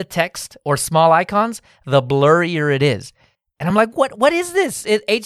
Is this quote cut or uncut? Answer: uncut